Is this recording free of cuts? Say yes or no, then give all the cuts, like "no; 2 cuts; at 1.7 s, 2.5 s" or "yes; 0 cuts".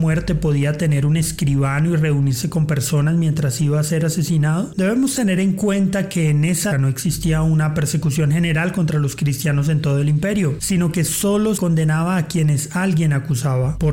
no; 2 cuts; at 6.7 s, 11.6 s